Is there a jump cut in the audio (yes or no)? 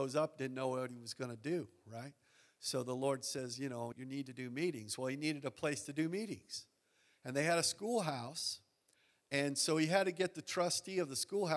yes